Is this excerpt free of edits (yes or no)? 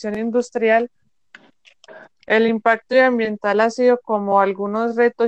yes